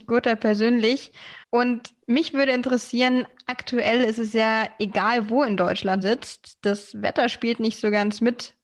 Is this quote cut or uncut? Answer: cut